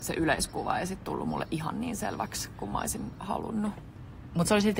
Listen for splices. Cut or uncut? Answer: uncut